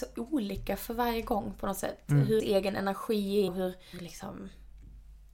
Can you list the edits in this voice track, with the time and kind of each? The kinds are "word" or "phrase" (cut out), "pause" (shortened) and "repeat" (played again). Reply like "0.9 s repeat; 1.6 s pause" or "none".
2.4 s word; 3.5 s word; 3.9 s word

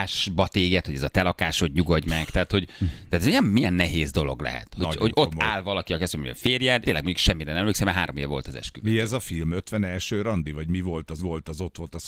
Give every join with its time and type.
3.4 s word; 6.8 s word; 11.2 s repeat

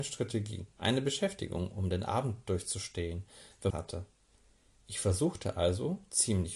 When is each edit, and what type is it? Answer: 3.7 s phrase

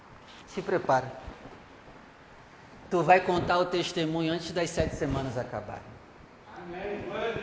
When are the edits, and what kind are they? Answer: none

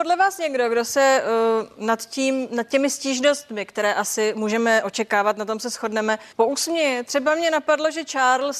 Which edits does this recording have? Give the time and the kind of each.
6.3 s pause

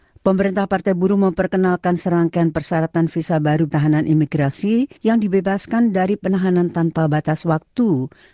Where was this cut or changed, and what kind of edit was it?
3.7 s word; 5.0 s pause

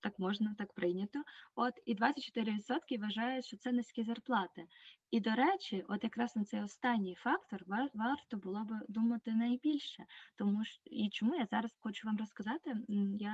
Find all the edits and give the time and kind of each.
11.8 s word

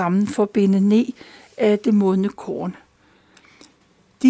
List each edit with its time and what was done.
none

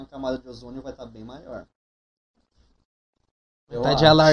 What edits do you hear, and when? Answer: none

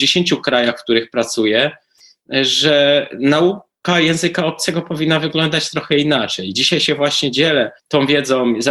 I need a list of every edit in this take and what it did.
7.8 s pause

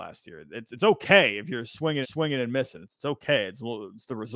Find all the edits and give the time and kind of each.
2.0 s repeat

